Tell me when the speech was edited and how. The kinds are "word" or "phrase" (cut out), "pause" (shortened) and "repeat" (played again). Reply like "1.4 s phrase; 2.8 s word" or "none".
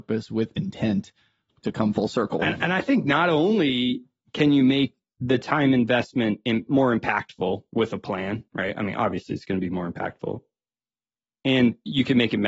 1.5 s word; 8.5 s pause